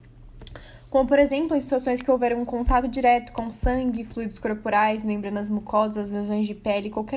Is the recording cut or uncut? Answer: uncut